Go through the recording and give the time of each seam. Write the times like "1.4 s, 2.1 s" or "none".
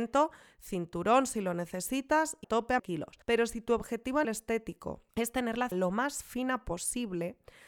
2.4 s, 2.8 s, 3.2 s, 4.2 s, 5.1 s, 5.7 s

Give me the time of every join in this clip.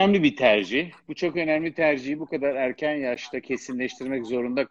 none

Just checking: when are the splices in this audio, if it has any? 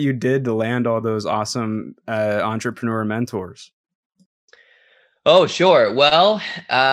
none

